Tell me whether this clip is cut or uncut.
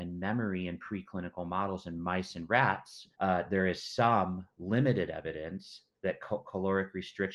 cut